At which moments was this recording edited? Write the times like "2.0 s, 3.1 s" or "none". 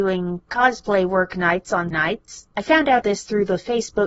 1.9 s, 2.5 s, 3.0 s